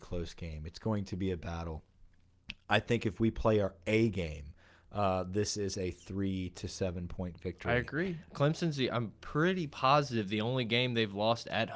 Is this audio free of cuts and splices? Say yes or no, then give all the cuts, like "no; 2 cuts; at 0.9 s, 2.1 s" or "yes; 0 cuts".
yes; 0 cuts